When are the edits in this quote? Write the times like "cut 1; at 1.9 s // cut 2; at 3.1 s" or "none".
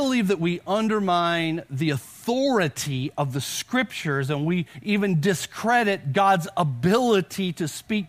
none